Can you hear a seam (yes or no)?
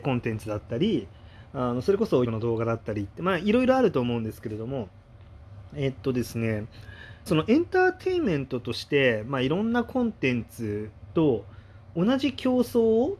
yes